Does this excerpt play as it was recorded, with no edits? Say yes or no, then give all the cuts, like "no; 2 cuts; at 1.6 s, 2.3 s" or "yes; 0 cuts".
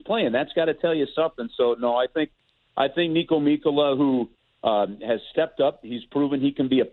yes; 0 cuts